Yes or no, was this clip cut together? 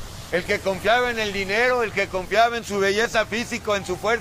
no